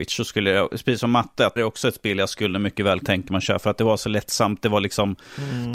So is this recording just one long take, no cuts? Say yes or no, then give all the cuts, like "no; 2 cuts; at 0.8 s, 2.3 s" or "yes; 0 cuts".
no; 2 cuts; at 1.6 s, 3.0 s